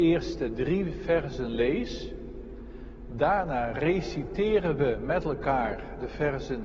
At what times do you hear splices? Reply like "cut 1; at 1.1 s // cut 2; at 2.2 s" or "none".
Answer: none